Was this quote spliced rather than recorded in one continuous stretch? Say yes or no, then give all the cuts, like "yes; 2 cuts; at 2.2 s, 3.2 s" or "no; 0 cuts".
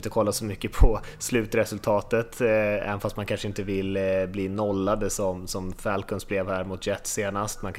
no; 0 cuts